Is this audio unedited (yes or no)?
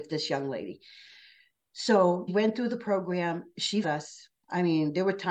no